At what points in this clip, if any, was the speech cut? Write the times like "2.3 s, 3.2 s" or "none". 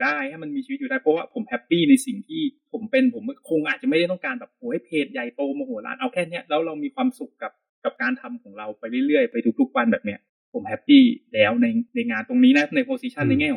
7.7 s, 10.3 s